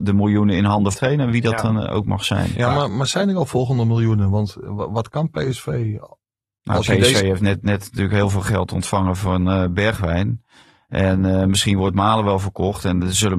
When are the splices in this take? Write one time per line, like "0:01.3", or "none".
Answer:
0:00.9